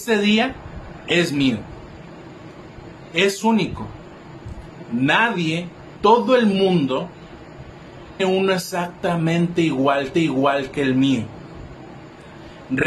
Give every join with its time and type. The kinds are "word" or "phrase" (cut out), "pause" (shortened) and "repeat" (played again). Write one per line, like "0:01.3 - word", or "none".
0:06.0 - word
0:08.2 - word
0:10.1 - repeat